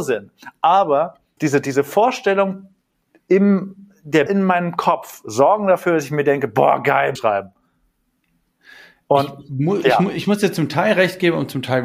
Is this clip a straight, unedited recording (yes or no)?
no